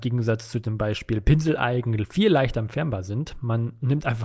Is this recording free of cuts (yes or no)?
yes